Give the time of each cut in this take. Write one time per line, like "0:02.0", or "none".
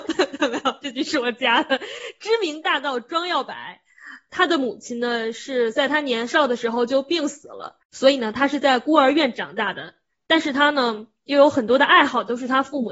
0:07.8